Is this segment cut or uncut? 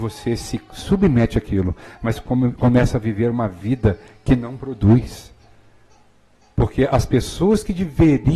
uncut